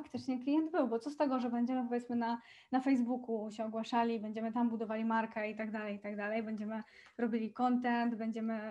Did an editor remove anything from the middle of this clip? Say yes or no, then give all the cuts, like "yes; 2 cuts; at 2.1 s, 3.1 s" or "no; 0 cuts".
no; 0 cuts